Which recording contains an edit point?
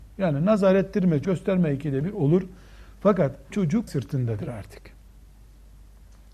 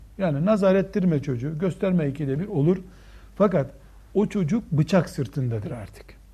first; 3 cuts; at 1.2 s, 3.5 s, 3.9 s

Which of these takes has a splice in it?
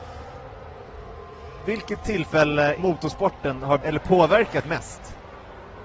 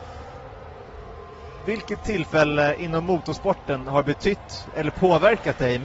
first; 3 cuts; at 2.8 s, 3.8 s, 4.6 s

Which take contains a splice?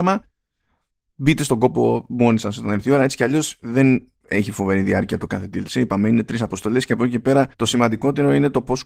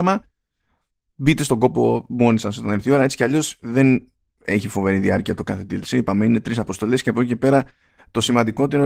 first; 2 cuts; at 4.2 s, 7.5 s

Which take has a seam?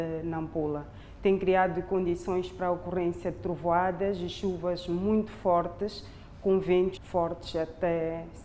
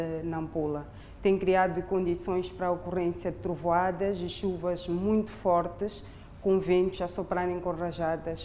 first; 1 cut; at 7.0 s

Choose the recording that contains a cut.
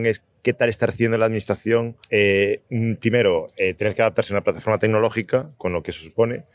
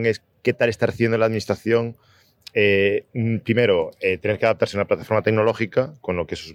first; 1 cut; at 2.0 s

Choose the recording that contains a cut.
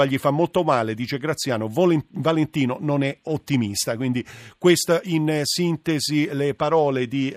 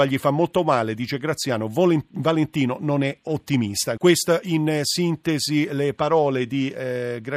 second; 1 cut; at 4.0 s

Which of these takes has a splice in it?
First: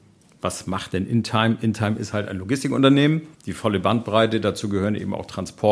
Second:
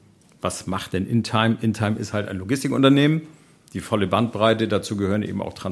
first; 1 cut; at 3.3 s

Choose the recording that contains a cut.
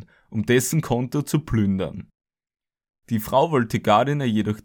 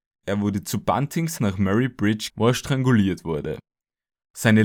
second; 2 cuts; at 1.4 s, 2.3 s

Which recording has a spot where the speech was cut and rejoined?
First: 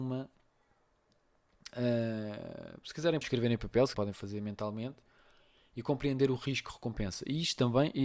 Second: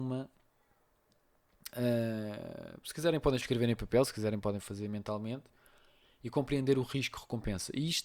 first; 2 cuts; at 3.2 s, 3.9 s

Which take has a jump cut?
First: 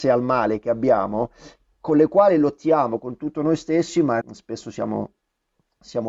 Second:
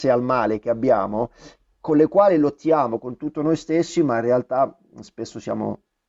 first; 1 cut; at 4.2 s

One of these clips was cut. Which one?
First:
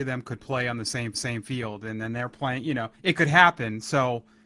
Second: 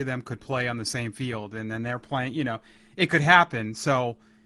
first; 2 cuts; at 1.1 s, 2.9 s

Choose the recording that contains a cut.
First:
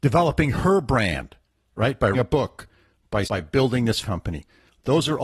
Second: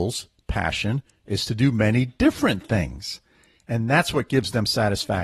first; 3 cuts; at 2.1 s, 3.3 s, 4.0 s

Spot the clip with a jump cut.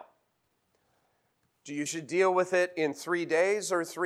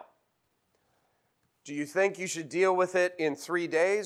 first; 1 cut; at 1.9 s

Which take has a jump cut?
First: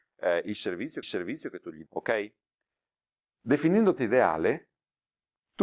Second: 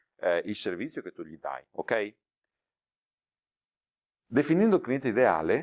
first; 4 cuts; at 1.0 s, 1.9 s, 3.1 s, 4.0 s

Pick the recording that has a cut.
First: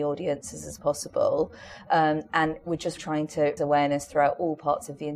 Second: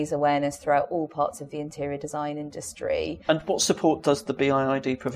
first; 2 cuts; at 3.0 s, 3.6 s

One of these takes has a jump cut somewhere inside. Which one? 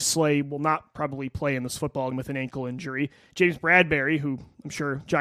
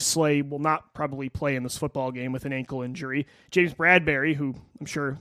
first; 1 cut; at 2.1 s

